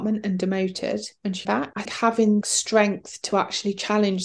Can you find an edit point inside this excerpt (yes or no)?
yes